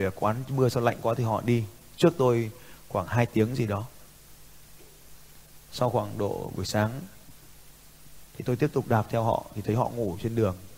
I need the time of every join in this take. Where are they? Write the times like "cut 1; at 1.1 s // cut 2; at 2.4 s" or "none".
cut 1; at 5.6 s // cut 2; at 8.3 s